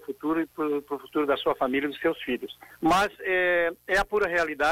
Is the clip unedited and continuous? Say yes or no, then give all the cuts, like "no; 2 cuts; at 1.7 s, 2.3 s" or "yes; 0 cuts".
no; 1 cut; at 2.7 s